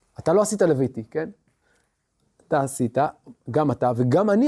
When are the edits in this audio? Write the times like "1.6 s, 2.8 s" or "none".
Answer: none